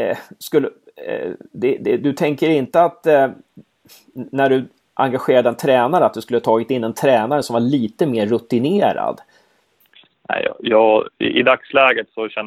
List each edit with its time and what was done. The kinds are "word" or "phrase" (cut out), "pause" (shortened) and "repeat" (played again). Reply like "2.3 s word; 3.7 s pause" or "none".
none